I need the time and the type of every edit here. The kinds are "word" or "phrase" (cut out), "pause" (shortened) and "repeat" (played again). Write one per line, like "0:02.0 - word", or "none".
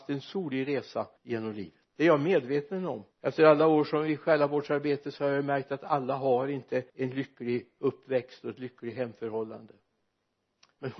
0:01.2 - pause
0:01.9 - pause
0:03.1 - pause
0:06.9 - pause